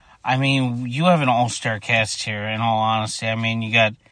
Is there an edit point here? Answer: no; 0 cuts

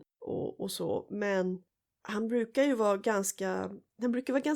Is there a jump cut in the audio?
no; 0 cuts

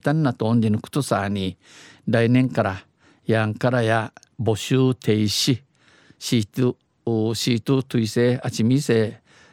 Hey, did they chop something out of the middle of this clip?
no; 0 cuts

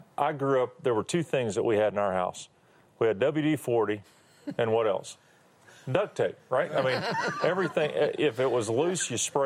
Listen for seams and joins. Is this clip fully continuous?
yes; 0 cuts

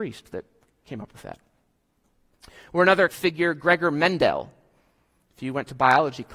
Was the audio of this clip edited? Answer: yes; 1 cut; at 3.1 s

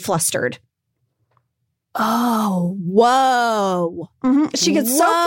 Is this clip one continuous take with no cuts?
yes; 0 cuts

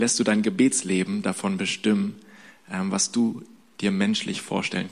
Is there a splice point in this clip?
no; 0 cuts

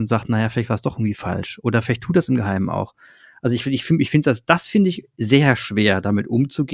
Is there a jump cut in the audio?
no; 0 cuts

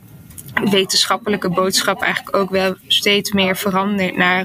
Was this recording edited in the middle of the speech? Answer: no; 0 cuts

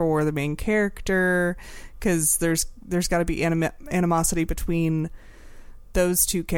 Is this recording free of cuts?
yes; 0 cuts

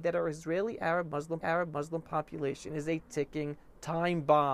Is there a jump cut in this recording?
yes; 1 cut; at 1.4 s

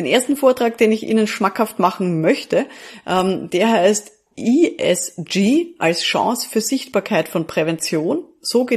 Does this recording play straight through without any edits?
yes; 0 cuts

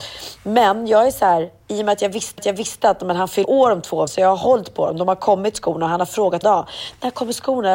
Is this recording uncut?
no; 4 cuts; at 2.4 s, 3.4 s, 4.1 s, 6.4 s

